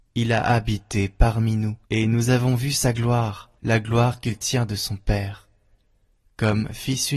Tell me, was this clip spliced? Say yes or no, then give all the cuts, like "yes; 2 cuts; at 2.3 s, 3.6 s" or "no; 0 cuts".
yes; 2 cuts; at 1.8 s, 3.6 s